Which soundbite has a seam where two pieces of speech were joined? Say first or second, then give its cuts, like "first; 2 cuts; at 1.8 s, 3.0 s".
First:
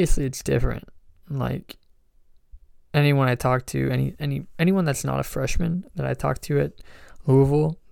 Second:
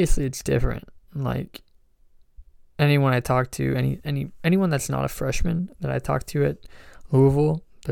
second; 1 cut; at 1.0 s